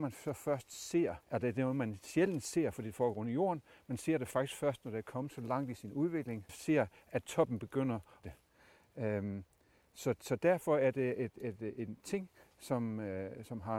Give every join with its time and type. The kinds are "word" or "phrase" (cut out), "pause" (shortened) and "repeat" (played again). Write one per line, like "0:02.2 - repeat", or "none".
0:01.2 - pause
0:06.5 - phrase
0:08.2 - phrase